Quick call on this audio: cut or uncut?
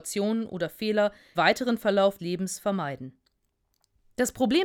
cut